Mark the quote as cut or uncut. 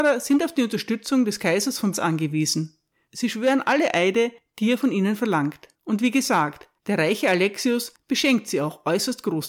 cut